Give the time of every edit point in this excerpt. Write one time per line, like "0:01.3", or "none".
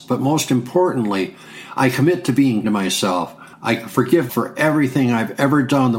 0:02.6
0:03.5
0:04.3